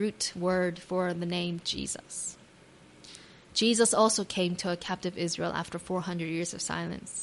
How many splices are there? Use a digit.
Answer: 0